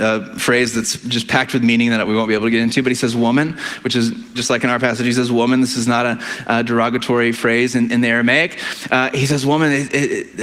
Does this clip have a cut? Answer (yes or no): yes